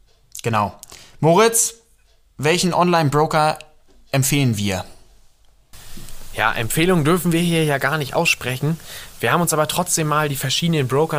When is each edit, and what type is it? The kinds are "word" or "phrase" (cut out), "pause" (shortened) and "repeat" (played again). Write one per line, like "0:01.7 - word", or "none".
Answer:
none